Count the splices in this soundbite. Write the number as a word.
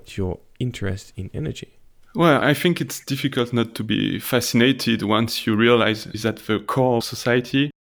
three